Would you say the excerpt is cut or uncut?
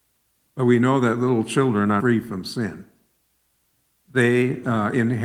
cut